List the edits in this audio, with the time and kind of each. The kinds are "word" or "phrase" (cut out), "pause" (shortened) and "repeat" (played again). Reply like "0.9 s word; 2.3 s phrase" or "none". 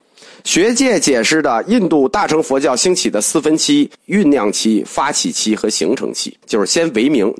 3.9 s phrase; 6.4 s pause